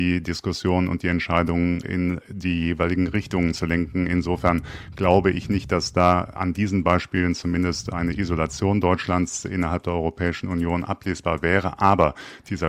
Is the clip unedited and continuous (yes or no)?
yes